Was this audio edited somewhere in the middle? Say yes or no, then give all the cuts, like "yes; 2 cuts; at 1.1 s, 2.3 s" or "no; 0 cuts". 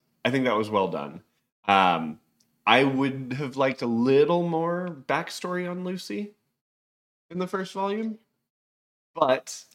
no; 0 cuts